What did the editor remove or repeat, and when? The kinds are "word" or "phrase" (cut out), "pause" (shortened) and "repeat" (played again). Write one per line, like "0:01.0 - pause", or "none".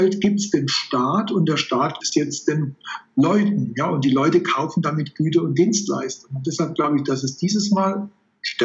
0:02.0 - word